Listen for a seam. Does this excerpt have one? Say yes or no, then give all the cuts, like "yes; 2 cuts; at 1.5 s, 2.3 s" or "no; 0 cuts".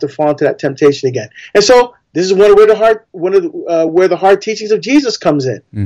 no; 0 cuts